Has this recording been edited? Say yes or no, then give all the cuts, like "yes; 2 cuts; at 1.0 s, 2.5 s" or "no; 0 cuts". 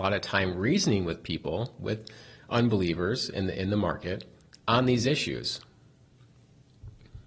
no; 0 cuts